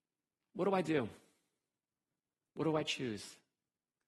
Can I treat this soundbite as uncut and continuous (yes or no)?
yes